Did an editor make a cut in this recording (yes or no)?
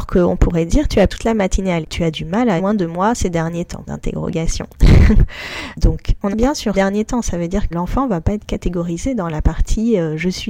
yes